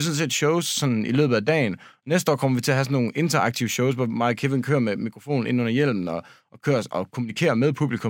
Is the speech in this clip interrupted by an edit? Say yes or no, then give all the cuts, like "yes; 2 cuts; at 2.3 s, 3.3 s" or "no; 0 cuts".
no; 0 cuts